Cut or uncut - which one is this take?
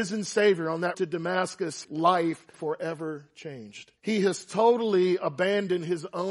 cut